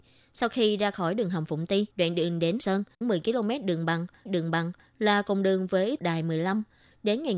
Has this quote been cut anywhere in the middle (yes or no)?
yes